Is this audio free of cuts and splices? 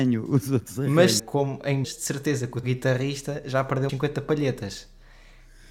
no; 4 cuts; at 1.2 s, 1.8 s, 2.6 s, 3.9 s

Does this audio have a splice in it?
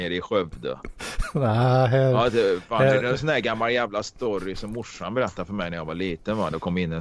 no; 0 cuts

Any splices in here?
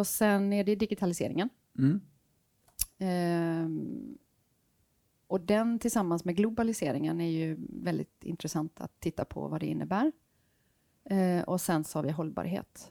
no; 0 cuts

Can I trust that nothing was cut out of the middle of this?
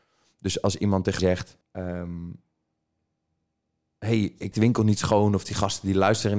no; 3 cuts; at 1.2 s, 1.6 s, 4.5 s

